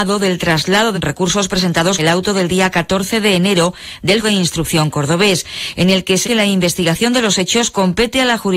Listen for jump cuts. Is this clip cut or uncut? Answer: cut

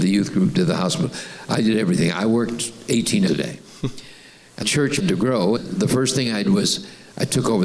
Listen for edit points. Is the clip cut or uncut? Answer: cut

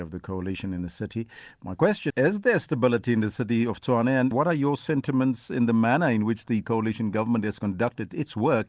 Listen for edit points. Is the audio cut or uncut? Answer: cut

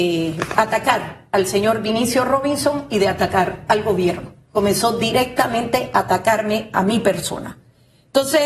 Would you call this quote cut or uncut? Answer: cut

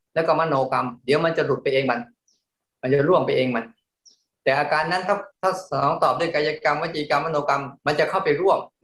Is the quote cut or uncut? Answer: uncut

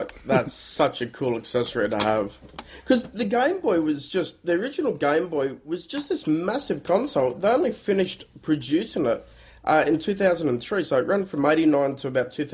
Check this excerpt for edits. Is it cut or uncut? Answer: uncut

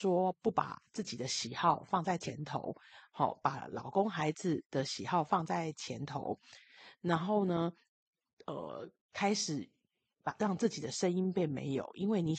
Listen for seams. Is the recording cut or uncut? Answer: uncut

